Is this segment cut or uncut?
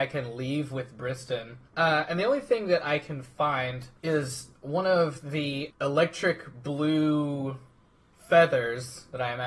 cut